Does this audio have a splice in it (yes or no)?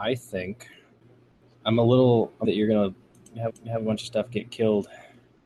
yes